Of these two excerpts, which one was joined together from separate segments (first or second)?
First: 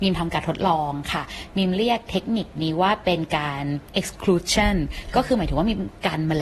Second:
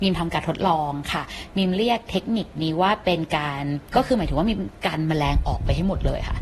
second